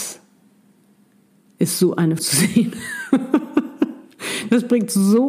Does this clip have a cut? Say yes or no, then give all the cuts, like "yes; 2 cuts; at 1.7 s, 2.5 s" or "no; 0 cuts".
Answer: yes; 1 cut; at 2.2 s